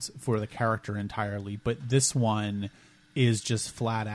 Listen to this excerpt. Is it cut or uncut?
uncut